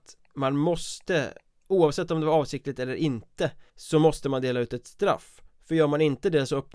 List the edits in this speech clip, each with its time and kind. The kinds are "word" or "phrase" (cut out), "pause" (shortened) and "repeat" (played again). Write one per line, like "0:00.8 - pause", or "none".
0:03.7 - pause